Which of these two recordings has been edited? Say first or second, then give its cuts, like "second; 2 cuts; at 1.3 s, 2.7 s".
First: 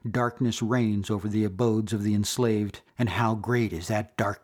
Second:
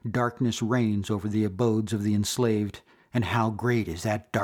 first; 1 cut; at 2.9 s